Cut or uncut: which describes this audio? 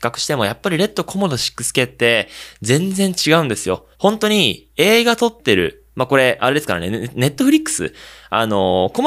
cut